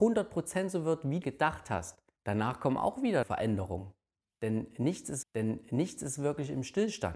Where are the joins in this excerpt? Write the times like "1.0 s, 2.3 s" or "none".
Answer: 1.2 s, 2.2 s, 3.2 s, 5.2 s